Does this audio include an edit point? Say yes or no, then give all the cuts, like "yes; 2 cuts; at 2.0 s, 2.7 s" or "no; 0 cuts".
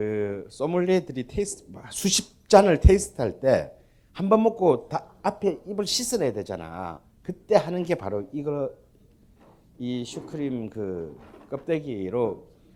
no; 0 cuts